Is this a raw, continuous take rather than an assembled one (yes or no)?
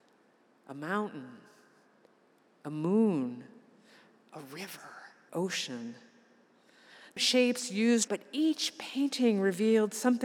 no